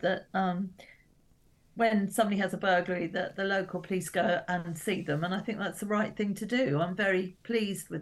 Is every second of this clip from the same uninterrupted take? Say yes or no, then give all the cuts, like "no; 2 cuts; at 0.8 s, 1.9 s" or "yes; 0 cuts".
yes; 0 cuts